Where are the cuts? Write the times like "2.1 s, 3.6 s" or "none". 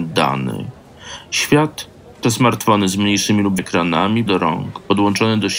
2.2 s, 3.6 s, 4.3 s